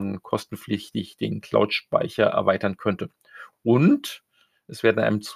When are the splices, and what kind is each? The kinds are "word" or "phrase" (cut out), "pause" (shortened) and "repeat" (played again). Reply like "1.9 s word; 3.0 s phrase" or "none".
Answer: none

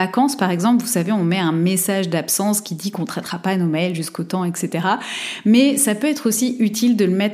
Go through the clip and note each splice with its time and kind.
none

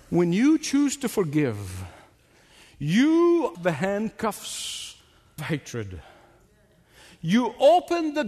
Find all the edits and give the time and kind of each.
3.5 s word; 5.4 s word

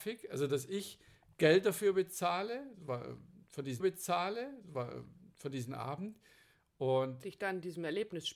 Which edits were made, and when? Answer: 3.8 s repeat

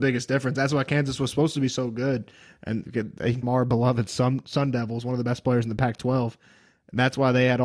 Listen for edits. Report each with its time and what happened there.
3.4 s phrase

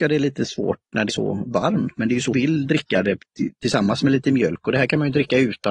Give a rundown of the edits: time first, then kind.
1.1 s word; 2.3 s word

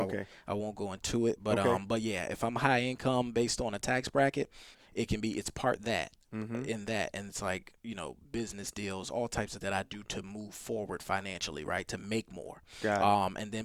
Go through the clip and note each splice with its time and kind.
4.7 s word; 7.3 s word; 9.6 s word

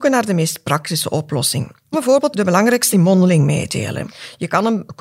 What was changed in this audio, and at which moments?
1.9 s word; 2.3 s word; 2.9 s word

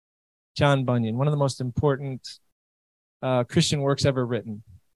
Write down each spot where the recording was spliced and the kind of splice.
none

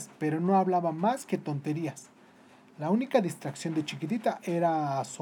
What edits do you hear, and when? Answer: none

